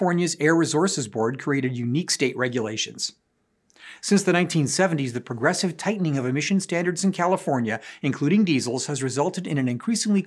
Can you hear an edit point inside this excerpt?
no; 0 cuts

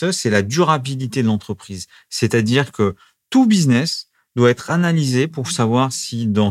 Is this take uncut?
yes; 0 cuts

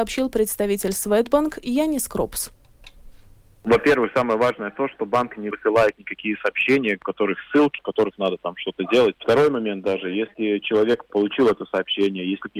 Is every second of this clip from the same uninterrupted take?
yes; 0 cuts

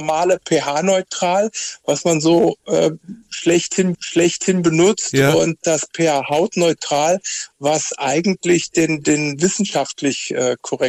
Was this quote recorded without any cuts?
no; 1 cut; at 3.9 s

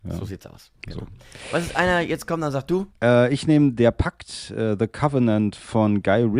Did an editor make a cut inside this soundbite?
yes; 1 cut; at 2.9 s

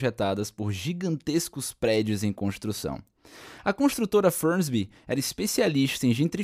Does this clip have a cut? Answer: no; 0 cuts

